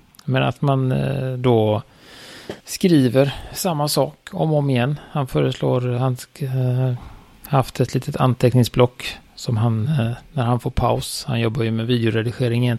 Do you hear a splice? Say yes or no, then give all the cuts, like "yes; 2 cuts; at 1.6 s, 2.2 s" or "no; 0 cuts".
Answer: yes; 2 cuts; at 2.6 s, 9.3 s